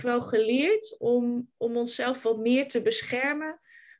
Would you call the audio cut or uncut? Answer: uncut